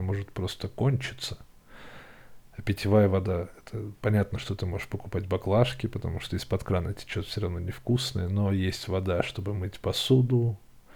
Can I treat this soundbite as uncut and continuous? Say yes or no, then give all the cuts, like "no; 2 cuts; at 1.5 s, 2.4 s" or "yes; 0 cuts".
yes; 0 cuts